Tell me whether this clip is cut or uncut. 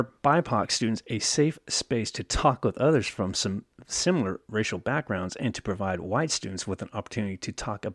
uncut